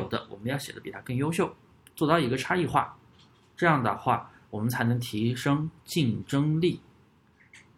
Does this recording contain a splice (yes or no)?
no